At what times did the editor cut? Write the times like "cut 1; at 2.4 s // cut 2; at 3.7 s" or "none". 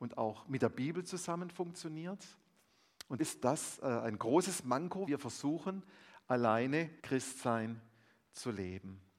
cut 1; at 3.2 s // cut 2; at 5.1 s // cut 3; at 7.0 s

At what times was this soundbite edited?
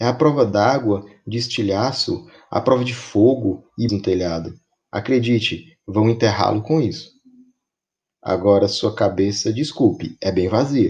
cut 1; at 3.9 s

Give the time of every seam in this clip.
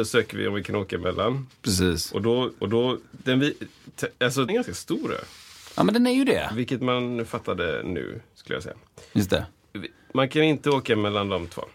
cut 1; at 2.6 s // cut 2; at 4.5 s

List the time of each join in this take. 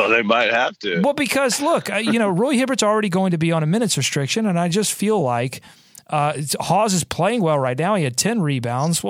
none

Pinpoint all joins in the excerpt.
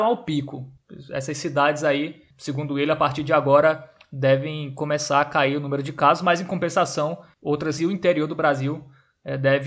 cut 1; at 7.8 s

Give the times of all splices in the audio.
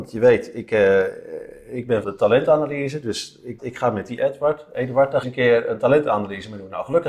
cut 1; at 2.0 s // cut 2; at 3.6 s // cut 3; at 5.2 s

